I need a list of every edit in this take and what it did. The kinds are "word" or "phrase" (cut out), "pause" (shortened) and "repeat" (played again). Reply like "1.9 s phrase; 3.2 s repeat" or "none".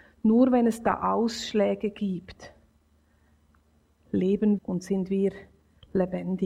4.6 s word